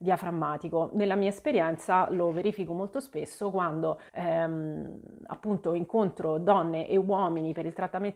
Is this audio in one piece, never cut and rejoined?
no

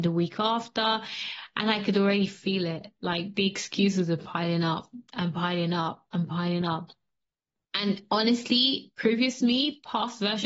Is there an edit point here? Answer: no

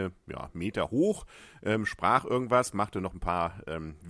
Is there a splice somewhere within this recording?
no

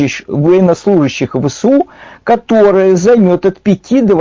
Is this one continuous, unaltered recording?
yes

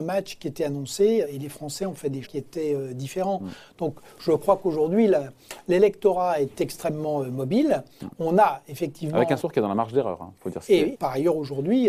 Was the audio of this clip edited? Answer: yes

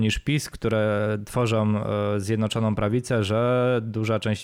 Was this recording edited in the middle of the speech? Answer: no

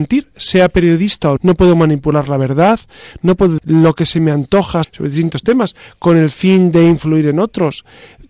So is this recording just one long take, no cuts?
no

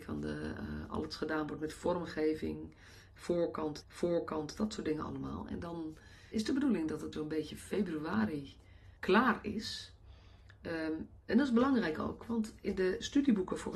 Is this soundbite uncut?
no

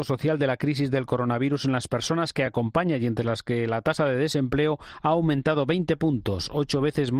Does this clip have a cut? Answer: no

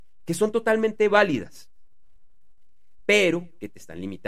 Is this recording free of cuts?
yes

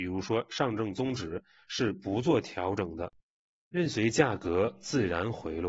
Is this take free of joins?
yes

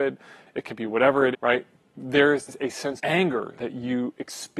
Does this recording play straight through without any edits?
no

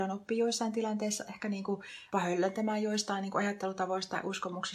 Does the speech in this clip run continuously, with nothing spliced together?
no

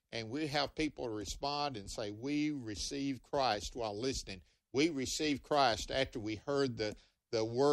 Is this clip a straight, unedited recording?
yes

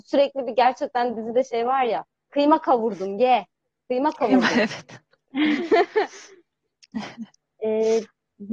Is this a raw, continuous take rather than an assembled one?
yes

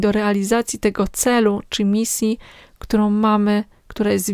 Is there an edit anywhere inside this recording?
no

